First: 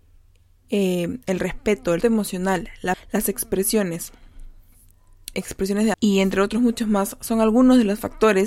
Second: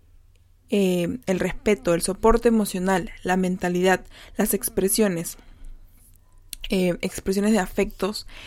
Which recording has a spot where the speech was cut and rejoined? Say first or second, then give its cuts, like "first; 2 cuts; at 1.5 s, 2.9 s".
first; 4 cuts; at 2.0 s, 2.9 s, 5.3 s, 5.9 s